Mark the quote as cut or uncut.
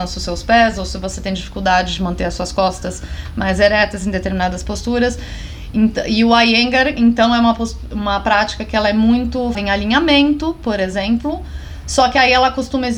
cut